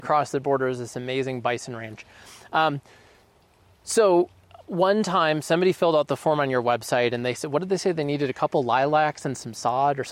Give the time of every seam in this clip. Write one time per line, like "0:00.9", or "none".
none